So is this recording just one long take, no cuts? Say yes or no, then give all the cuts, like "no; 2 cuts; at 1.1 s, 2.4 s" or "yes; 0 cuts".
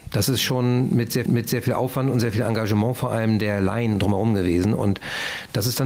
no; 1 cut; at 1.3 s